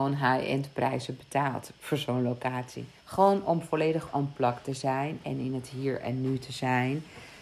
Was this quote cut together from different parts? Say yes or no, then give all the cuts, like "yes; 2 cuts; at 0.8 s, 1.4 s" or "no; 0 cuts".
yes; 1 cut; at 3.0 s